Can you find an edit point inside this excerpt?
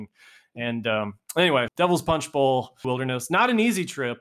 yes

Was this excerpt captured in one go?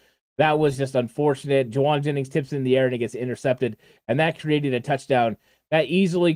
yes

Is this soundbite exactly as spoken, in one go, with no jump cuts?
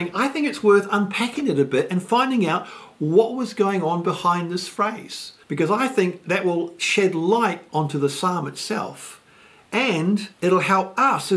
no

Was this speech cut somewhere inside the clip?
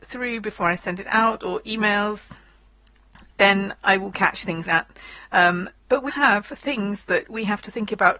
yes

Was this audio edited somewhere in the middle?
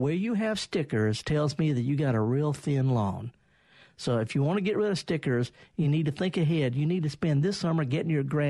no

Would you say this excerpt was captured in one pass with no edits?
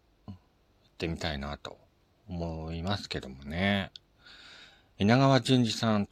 yes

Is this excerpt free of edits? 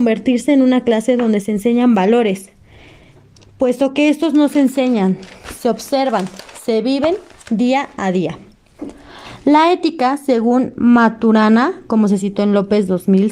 yes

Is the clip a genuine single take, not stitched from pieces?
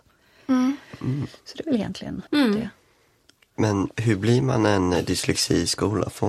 no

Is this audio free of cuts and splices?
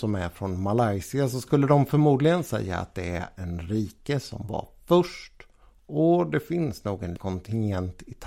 no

